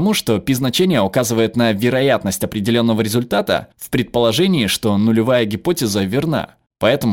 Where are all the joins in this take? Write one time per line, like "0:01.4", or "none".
0:03.7